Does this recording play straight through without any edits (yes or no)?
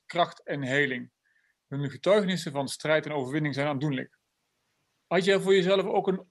yes